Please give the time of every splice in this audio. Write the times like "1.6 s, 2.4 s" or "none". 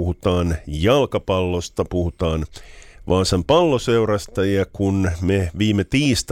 none